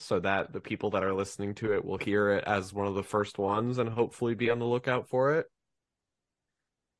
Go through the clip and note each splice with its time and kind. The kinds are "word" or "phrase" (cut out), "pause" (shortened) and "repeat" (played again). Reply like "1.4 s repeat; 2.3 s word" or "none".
none

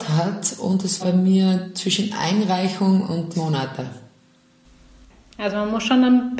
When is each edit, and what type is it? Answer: 1.0 s word; 3.3 s phrase

